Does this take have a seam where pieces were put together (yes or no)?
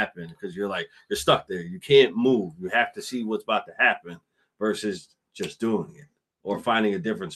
no